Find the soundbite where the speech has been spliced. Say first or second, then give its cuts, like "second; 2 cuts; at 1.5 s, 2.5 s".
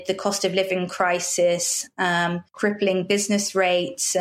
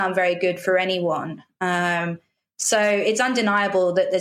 first; 1 cut; at 2.5 s